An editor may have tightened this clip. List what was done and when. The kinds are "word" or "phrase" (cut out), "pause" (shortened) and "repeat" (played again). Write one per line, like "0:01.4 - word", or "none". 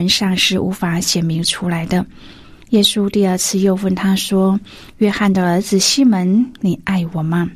0:02.6 - pause